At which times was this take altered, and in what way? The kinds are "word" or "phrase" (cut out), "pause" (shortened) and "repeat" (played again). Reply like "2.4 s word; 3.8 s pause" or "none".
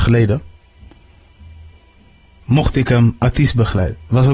none